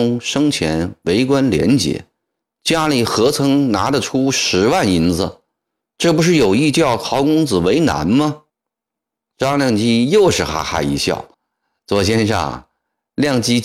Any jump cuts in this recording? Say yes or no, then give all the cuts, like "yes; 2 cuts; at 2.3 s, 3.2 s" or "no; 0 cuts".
yes; 2 cuts; at 8.5 s, 11.3 s